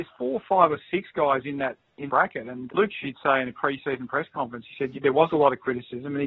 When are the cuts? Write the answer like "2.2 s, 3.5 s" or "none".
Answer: 2.1 s, 2.7 s, 3.0 s, 4.9 s

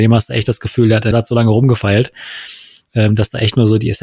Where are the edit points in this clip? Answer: 1.1 s

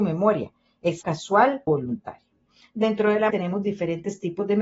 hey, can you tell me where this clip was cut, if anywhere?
1.0 s, 1.7 s, 3.3 s

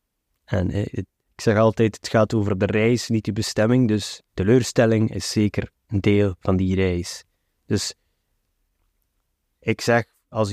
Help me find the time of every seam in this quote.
4.3 s

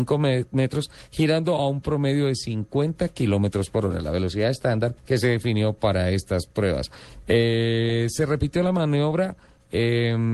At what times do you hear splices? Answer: 5.0 s

